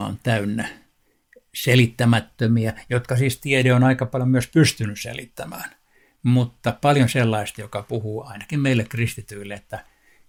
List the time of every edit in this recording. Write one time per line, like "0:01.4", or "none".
none